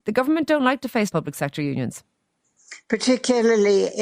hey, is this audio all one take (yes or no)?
no